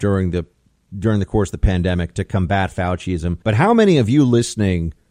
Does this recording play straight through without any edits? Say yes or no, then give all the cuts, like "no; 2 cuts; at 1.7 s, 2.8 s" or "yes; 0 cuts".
no; 1 cut; at 3.4 s